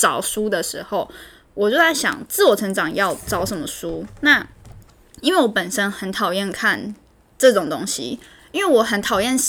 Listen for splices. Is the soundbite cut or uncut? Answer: uncut